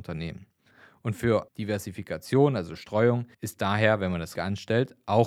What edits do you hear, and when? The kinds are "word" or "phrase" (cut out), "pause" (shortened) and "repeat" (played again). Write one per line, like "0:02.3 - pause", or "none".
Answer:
0:01.5 - word
0:03.3 - pause
0:04.4 - word